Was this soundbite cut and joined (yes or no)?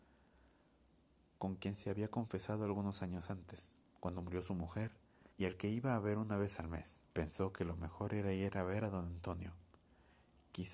yes